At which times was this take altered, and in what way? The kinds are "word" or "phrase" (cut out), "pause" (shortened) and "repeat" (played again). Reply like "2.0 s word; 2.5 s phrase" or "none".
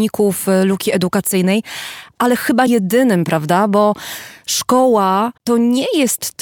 2.7 s word; 5.4 s pause